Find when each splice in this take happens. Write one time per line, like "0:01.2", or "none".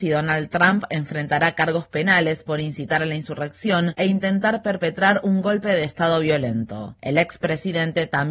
none